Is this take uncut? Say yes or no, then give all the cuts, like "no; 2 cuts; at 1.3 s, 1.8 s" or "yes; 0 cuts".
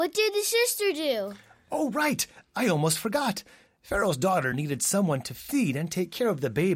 yes; 0 cuts